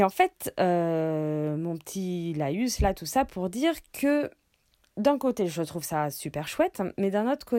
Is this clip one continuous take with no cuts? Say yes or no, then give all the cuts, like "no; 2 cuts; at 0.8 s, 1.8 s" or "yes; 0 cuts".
yes; 0 cuts